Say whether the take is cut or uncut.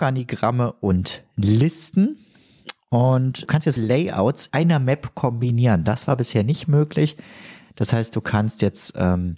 cut